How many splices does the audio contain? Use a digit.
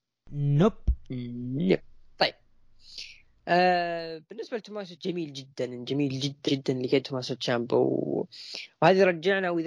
3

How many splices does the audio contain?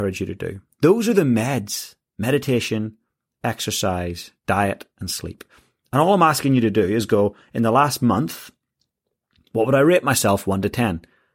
0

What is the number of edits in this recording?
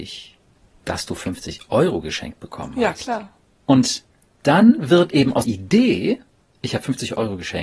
1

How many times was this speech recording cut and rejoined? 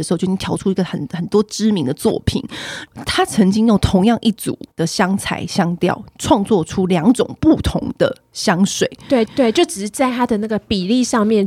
2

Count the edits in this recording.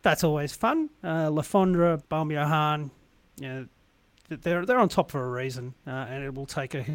1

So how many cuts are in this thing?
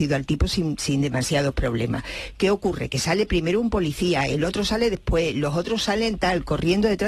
0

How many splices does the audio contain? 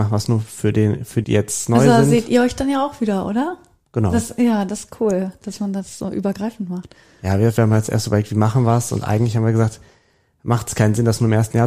1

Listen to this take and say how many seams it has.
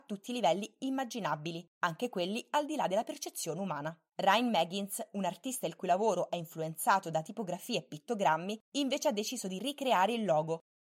3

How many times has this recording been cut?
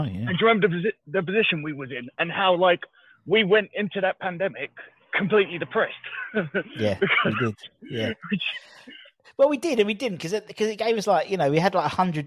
0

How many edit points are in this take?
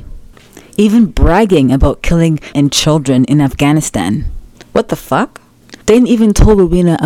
3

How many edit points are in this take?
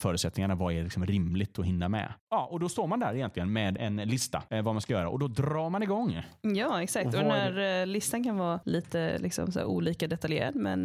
0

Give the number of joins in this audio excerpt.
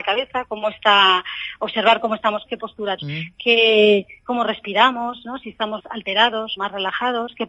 4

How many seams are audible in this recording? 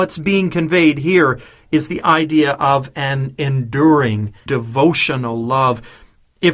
1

